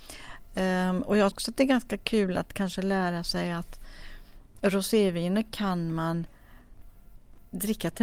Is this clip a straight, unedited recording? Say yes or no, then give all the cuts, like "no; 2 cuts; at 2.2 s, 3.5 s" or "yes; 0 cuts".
no; 1 cut; at 1.3 s